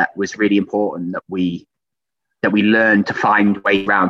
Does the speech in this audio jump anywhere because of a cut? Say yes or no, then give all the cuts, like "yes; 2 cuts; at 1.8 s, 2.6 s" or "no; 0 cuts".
no; 0 cuts